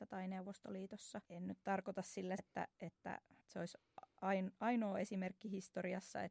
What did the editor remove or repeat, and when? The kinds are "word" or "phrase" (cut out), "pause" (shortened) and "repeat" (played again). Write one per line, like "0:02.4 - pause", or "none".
0:01.2 - pause
0:02.4 - word
0:03.4 - pause